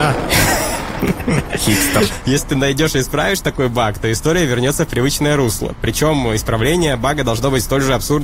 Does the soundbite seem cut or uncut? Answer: uncut